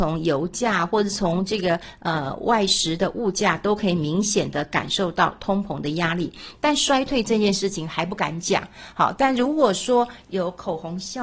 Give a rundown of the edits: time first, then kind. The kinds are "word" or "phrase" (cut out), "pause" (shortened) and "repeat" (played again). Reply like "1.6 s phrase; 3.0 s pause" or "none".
none